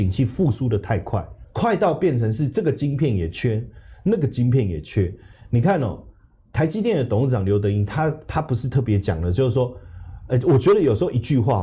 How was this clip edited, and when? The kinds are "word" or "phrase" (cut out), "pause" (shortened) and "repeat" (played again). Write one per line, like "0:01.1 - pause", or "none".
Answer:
0:01.4 - word